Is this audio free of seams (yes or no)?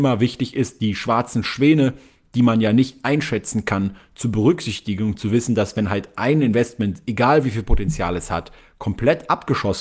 yes